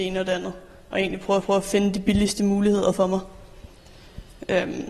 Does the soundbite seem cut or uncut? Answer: cut